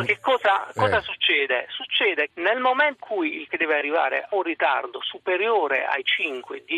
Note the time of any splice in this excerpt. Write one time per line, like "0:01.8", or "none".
0:02.3
0:03.0
0:03.5
0:04.3